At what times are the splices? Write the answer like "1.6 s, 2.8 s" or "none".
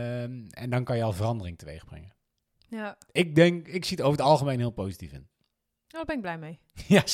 none